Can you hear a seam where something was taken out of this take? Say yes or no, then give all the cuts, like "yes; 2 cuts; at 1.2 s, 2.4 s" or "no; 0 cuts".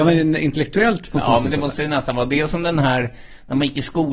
no; 0 cuts